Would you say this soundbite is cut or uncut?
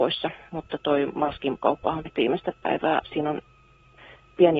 cut